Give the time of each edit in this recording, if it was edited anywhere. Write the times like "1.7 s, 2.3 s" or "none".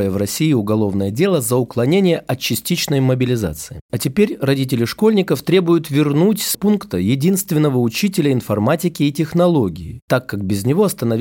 6.5 s

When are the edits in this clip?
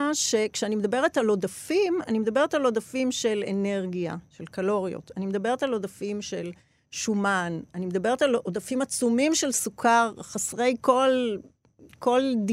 none

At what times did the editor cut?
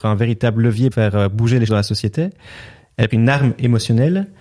0.9 s, 1.7 s, 3.1 s

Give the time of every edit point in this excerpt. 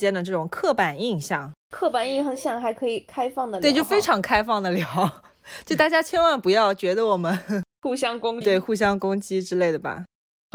1.6 s, 7.7 s, 8.4 s

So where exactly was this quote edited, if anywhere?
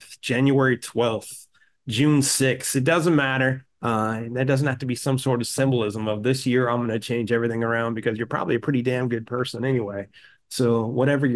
none

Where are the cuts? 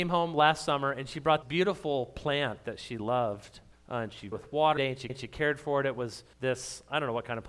1.4 s, 3.7 s, 4.3 s, 4.8 s, 5.1 s, 6.3 s

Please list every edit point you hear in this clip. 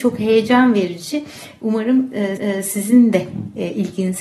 2.4 s

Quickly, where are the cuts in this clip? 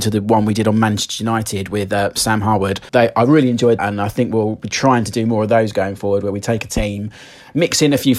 2.9 s, 3.8 s

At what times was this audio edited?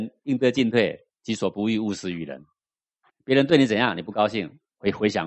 none

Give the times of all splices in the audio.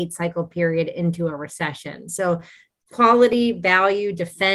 none

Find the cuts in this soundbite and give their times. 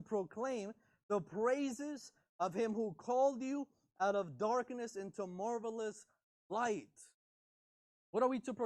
none

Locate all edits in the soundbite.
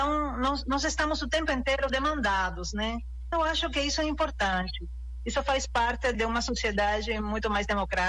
1.9 s, 3.3 s, 6.1 s

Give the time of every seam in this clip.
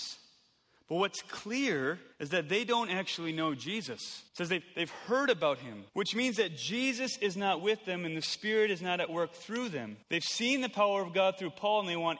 2.1 s, 4.3 s, 5.9 s, 10.0 s

